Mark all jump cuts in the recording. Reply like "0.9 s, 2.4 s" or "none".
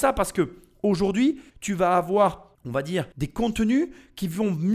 1.5 s, 2.5 s, 3.1 s